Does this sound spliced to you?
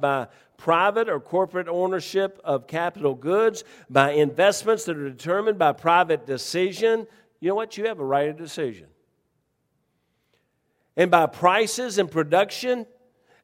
no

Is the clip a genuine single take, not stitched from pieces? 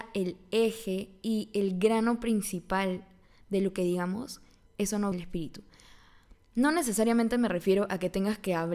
no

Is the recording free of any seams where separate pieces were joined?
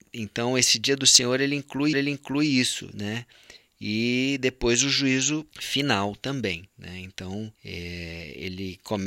no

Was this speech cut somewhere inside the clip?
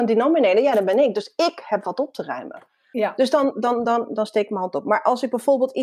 no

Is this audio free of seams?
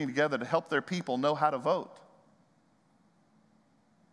yes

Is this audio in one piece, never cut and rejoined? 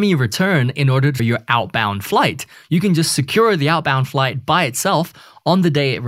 no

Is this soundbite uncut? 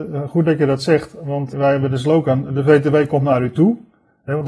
no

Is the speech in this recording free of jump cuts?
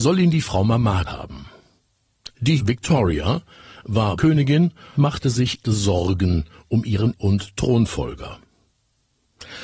no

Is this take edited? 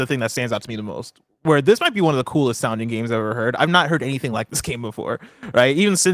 no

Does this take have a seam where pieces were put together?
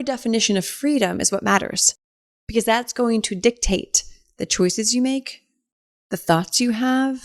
no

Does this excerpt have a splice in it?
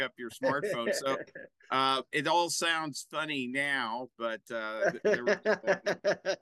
no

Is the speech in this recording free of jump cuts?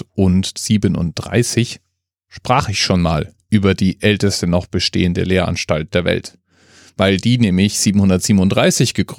yes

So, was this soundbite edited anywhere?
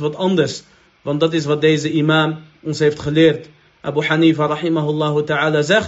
no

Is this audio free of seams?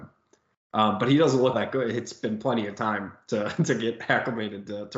no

